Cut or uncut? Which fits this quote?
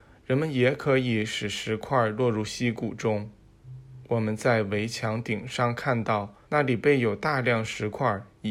cut